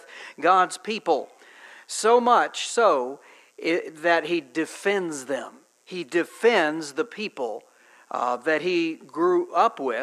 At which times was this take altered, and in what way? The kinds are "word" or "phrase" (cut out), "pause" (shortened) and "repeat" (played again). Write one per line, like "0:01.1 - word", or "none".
none